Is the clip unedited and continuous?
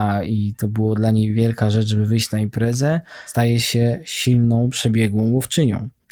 yes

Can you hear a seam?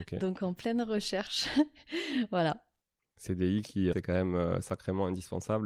yes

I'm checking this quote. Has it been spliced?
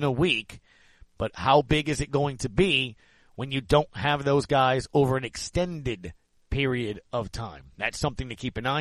no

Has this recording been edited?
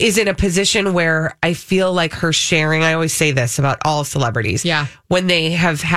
no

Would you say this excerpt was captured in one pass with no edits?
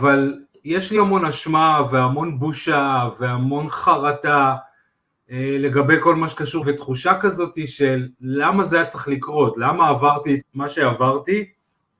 no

